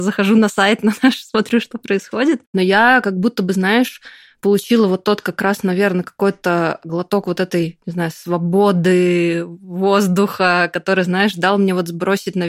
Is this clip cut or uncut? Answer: uncut